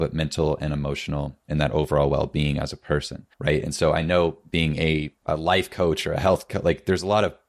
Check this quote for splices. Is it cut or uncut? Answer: cut